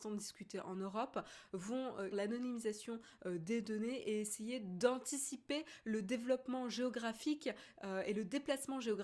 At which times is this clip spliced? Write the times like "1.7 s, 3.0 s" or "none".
2.1 s